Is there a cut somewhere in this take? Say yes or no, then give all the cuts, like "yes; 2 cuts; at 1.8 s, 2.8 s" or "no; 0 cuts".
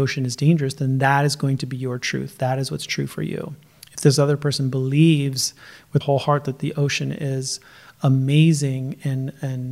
yes; 1 cut; at 6.0 s